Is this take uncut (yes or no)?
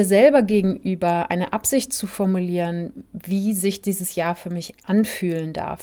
yes